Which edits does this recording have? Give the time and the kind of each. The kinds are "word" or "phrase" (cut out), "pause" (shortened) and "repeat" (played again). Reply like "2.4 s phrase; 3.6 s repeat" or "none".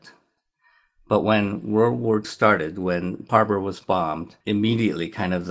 2.2 s word; 3.3 s word; 4.4 s pause